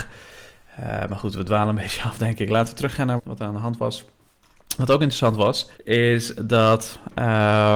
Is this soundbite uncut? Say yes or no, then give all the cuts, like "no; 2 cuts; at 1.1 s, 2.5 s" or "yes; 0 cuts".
no; 2 cuts; at 3.2 s, 5.7 s